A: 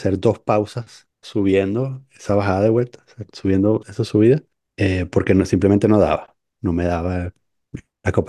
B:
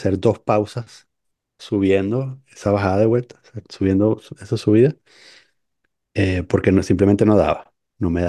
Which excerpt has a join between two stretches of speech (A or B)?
A